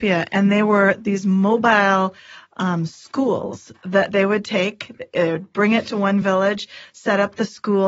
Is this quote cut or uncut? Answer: uncut